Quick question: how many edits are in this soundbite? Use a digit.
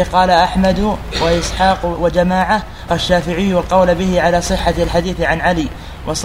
1